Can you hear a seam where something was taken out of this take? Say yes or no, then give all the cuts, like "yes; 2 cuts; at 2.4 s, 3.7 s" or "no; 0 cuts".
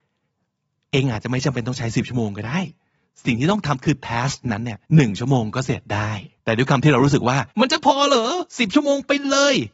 yes; 4 cuts; at 4.9 s, 6.4 s, 7.5 s, 8.5 s